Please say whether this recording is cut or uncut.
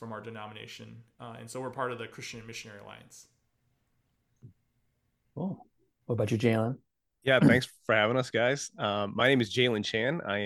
uncut